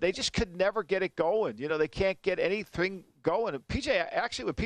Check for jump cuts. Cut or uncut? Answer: uncut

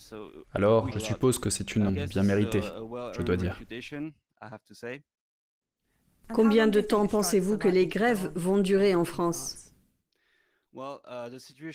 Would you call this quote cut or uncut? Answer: cut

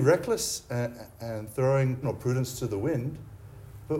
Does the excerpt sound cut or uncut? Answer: cut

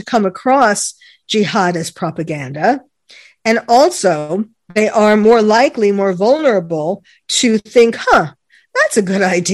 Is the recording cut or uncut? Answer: uncut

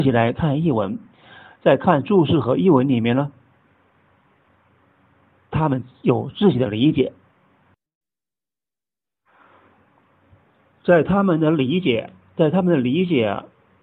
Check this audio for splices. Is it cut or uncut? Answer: uncut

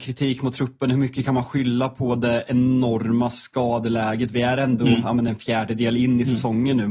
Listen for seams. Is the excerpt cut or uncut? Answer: uncut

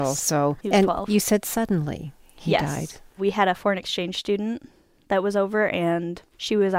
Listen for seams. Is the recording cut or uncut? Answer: uncut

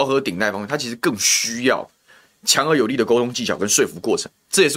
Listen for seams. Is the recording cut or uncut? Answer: uncut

